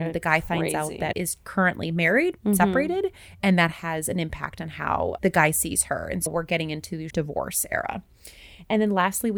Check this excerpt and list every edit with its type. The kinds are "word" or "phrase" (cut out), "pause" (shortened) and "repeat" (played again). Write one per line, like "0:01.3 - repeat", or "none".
0:01.1 - word
0:05.2 - word
0:06.3 - word
0:07.1 - word